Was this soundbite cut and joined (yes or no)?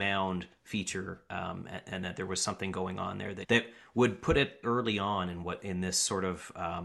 yes